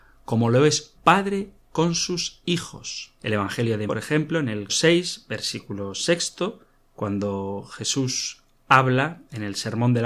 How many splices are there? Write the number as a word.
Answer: five